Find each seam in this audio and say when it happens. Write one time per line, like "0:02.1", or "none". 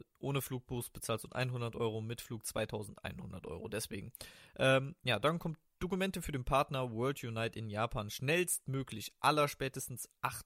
0:01.3